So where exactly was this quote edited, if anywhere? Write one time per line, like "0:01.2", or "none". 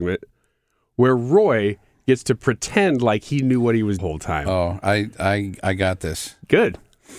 0:04.0

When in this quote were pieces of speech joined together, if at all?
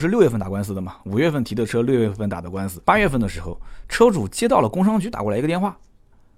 0:02.8

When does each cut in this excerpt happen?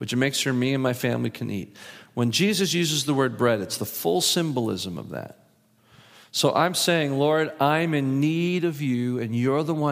none

